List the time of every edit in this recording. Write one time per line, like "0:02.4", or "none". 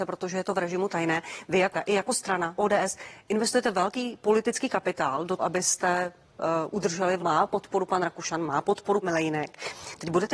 0:01.7
0:02.6
0:05.4
0:06.2
0:07.2
0:09.0